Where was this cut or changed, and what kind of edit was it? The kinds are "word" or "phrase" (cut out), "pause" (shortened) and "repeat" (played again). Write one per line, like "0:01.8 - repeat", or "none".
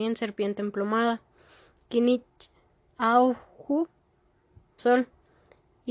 0:04.8 - word